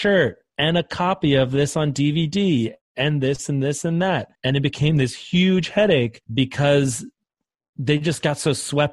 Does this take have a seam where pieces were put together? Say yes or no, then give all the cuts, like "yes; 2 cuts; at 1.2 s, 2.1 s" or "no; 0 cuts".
yes; 2 cuts; at 4.3 s, 6.2 s